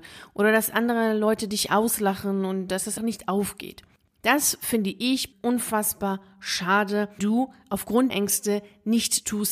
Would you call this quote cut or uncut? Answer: cut